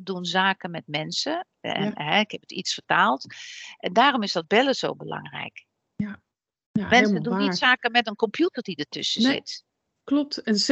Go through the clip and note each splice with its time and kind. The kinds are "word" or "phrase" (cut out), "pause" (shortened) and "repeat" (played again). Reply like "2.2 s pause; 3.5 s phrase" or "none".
none